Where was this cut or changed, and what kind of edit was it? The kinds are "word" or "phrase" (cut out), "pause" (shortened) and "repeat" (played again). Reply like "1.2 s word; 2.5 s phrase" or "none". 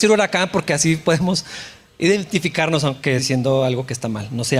3.2 s word